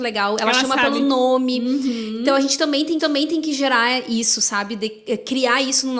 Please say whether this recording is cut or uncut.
cut